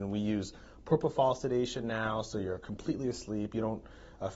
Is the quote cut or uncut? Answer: uncut